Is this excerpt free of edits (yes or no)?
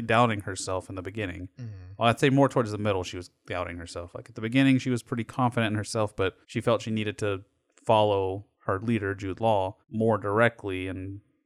no